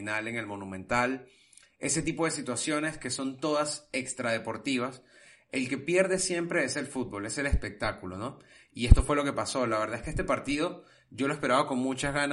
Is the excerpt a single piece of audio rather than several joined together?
yes; 0 cuts

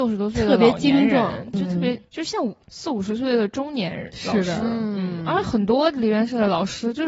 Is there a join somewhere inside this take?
yes; 3 cuts; at 1.5 s, 2.1 s, 2.6 s

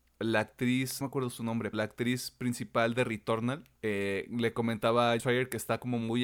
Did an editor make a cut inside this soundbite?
yes; 4 cuts; at 1.0 s, 1.7 s, 3.8 s, 5.2 s

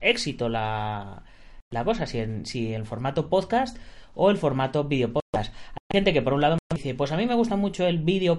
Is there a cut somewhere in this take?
no; 0 cuts

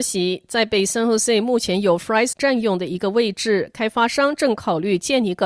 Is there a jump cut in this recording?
yes; 1 cut; at 2.3 s

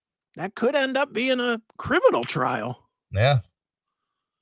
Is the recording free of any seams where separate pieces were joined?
no; 1 cut; at 1.7 s

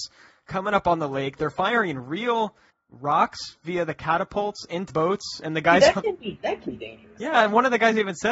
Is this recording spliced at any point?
yes; 3 cuts; at 2.7 s, 4.9 s, 6.7 s

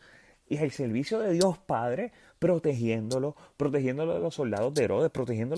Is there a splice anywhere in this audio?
no; 0 cuts

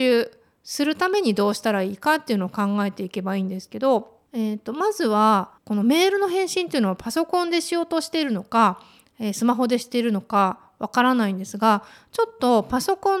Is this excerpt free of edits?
no; 2 cuts; at 4.3 s, 5.6 s

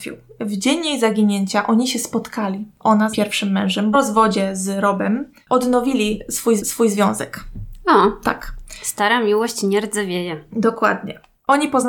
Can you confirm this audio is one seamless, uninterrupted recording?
no; 3 cuts; at 3.1 s, 3.9 s, 6.6 s

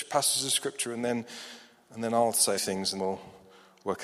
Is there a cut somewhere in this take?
yes; 2 cuts; at 2.6 s, 3.0 s

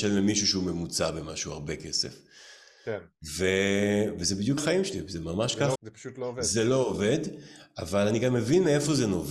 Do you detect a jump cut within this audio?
yes; 2 cuts; at 4.6 s, 5.8 s

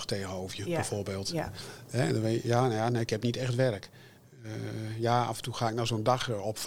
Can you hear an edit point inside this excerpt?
no; 0 cuts

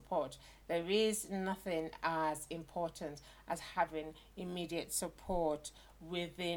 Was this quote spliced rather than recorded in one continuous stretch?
no; 0 cuts

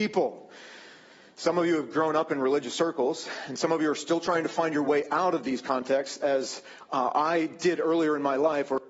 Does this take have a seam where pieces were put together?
no; 0 cuts

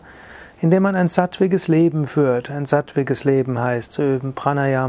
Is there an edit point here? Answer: yes; 1 cut; at 3.9 s

